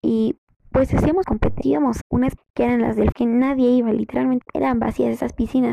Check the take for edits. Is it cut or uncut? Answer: cut